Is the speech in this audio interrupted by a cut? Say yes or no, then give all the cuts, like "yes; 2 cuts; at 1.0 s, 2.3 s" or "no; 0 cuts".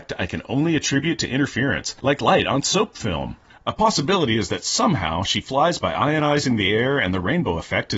no; 0 cuts